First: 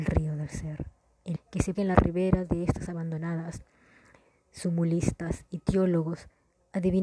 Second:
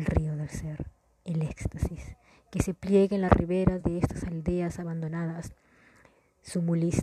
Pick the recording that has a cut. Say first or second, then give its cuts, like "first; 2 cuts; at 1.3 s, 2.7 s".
first; 3 cuts; at 1.4 s, 1.7 s, 2.9 s